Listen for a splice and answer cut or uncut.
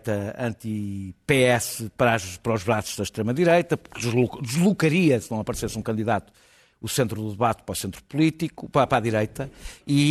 uncut